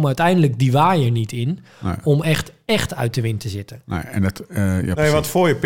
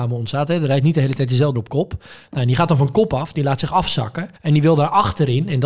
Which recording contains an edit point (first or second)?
second